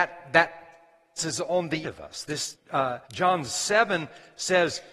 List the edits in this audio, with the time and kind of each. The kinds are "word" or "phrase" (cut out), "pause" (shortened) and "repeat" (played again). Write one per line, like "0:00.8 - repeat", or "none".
0:01.2 - word
0:01.8 - word
0:02.5 - word
0:03.0 - pause